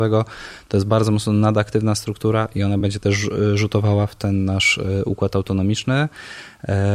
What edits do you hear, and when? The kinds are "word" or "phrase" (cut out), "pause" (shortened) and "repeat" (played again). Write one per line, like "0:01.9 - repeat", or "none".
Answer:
none